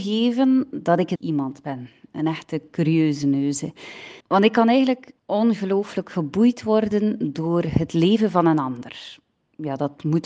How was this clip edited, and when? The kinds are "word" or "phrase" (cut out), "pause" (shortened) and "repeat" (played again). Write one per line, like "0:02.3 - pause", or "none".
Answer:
0:01.1 - word
0:04.2 - pause
0:05.2 - pause